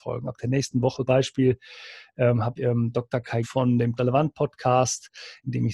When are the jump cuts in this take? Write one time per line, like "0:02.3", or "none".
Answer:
0:01.1
0:02.6
0:03.4
0:04.0